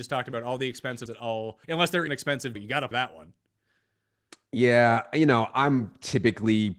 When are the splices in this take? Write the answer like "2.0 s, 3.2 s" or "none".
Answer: 1.1 s, 1.6 s, 2.1 s, 2.6 s, 2.9 s